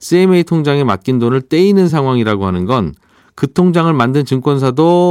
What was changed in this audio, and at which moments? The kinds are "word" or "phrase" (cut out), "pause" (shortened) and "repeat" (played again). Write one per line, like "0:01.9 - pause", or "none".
none

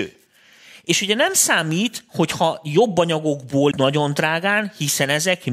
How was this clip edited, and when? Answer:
0:03.7 - word

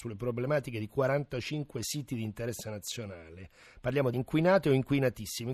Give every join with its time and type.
0:04.1 - word

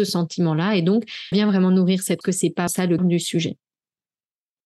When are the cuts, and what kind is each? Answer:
0:01.3 - word
0:02.2 - word
0:02.7 - word
0:03.0 - word

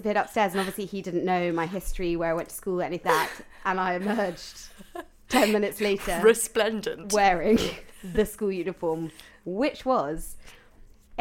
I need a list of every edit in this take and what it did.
0:03.0 - word

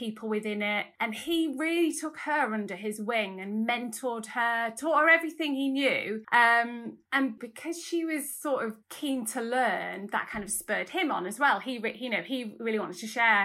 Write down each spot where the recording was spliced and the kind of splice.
0:08.8 - pause

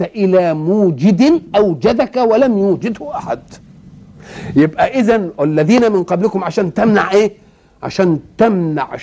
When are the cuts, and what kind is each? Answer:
none

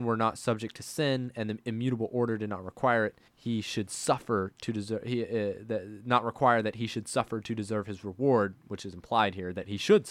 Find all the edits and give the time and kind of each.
0:03.3 - pause

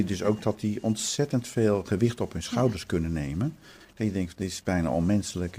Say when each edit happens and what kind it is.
none

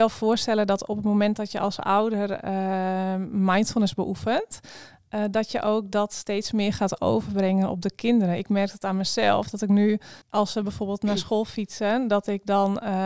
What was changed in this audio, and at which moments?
0:10.2 - pause

